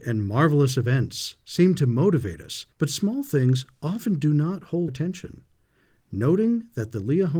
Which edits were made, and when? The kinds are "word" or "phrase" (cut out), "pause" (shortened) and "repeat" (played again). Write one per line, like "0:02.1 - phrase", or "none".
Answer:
0:02.7 - pause
0:04.9 - word